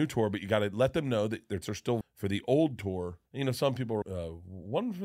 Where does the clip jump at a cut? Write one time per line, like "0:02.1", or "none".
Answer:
0:01.6
0:02.0
0:03.3
0:04.0